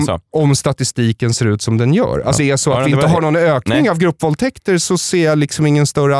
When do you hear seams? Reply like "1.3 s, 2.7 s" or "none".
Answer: 2.4 s